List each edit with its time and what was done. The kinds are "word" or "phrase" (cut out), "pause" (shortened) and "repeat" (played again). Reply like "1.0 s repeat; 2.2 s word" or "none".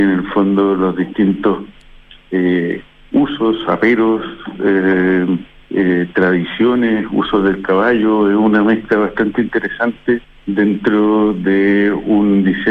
5.6 s pause; 10.2 s pause